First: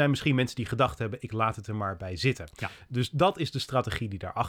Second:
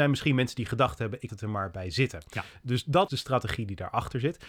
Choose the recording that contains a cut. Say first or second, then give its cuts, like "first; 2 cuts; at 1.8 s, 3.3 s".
second; 2 cuts; at 1.3 s, 3.1 s